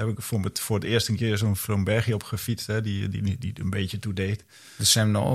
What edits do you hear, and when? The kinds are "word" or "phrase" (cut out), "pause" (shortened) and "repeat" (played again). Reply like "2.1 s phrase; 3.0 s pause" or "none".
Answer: none